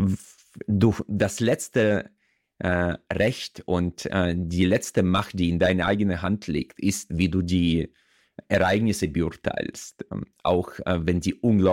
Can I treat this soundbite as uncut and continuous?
yes; 0 cuts

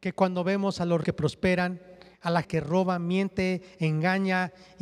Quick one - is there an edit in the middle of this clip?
yes; 2 cuts; at 1.0 s, 2.4 s

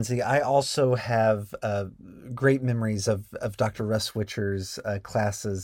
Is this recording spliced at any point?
no; 0 cuts

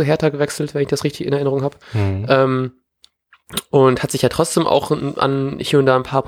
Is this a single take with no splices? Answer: no; 1 cut; at 1.8 s

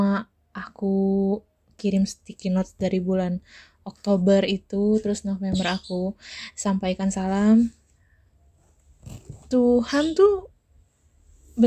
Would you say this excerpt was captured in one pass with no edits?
yes; 0 cuts

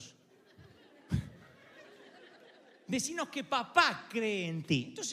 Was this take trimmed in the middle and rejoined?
no; 0 cuts

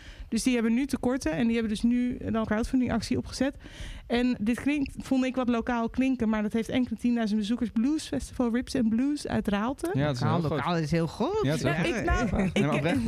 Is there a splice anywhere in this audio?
yes; 1 cut; at 2.4 s

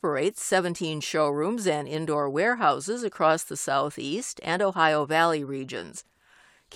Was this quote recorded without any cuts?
yes; 0 cuts

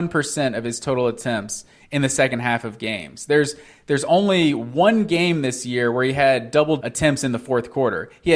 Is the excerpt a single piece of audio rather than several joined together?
no; 1 cut; at 6.8 s

